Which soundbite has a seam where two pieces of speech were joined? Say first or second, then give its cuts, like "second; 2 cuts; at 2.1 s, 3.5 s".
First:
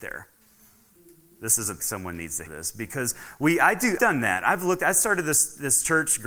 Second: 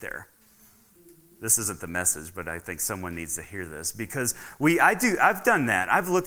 first; 3 cuts; at 1.8 s, 2.5 s, 4.0 s